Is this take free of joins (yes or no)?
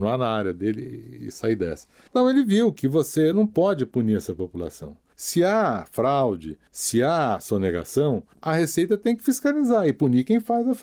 yes